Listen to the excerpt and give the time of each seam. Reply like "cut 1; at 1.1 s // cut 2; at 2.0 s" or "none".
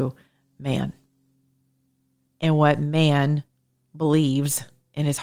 none